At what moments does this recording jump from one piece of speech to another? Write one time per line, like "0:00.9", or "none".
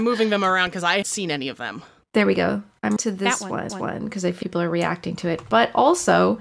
0:01.0
0:03.0
0:03.7
0:04.4